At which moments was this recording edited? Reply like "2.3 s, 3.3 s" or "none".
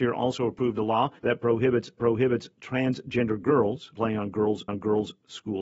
1.2 s, 2.0 s, 3.9 s, 4.7 s